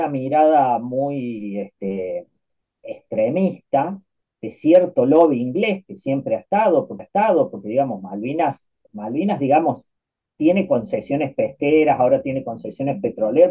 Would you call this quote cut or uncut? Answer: cut